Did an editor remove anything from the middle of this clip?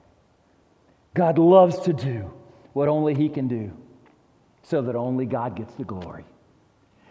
no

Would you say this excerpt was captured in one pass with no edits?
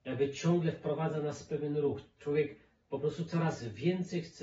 yes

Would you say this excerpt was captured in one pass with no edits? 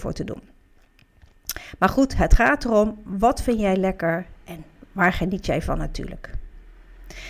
yes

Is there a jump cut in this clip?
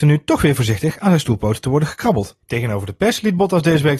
yes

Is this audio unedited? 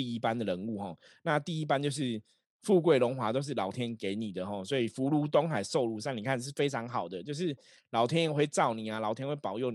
yes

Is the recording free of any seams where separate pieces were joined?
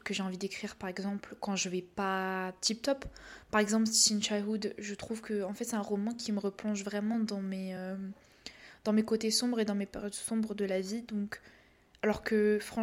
yes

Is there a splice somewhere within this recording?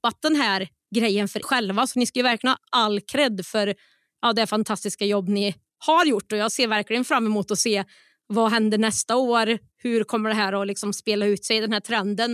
yes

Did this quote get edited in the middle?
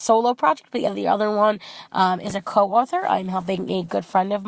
no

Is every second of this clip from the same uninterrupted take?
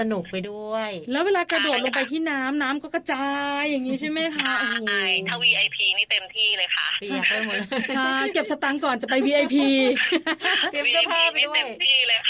yes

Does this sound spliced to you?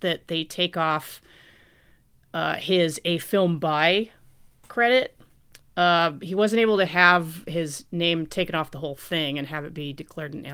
no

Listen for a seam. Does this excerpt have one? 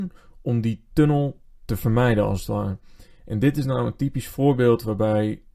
no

